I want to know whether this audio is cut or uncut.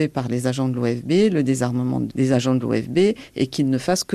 uncut